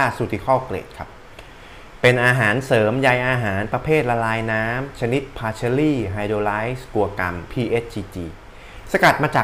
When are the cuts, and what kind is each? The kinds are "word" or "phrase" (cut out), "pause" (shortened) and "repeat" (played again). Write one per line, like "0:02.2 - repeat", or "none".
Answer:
0:07.5 - phrase